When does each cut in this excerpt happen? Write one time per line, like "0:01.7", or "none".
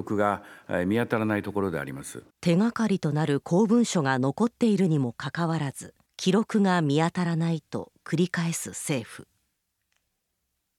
0:02.3
0:06.1